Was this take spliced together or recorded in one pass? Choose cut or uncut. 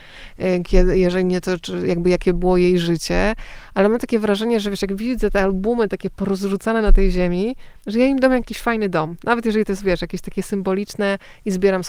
cut